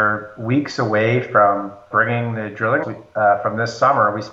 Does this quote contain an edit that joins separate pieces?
yes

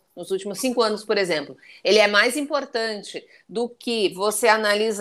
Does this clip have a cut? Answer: no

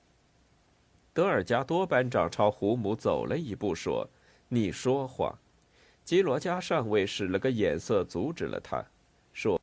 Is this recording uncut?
no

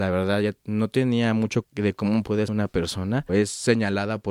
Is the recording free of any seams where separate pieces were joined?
no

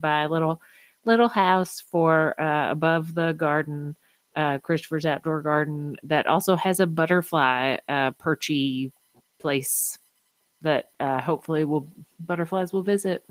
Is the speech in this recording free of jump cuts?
yes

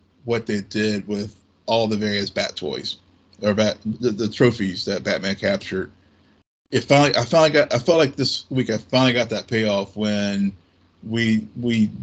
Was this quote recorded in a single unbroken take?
yes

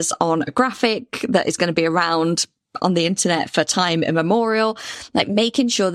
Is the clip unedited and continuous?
yes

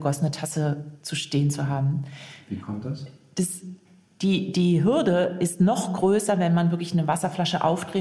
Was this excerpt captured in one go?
yes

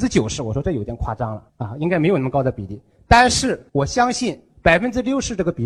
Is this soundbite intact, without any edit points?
no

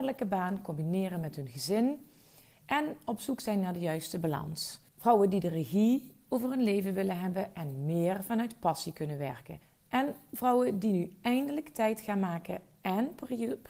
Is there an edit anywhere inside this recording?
yes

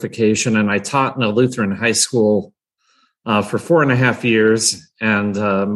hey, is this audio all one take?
yes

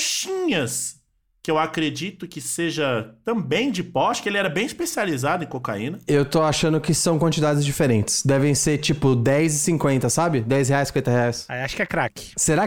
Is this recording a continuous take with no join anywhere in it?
yes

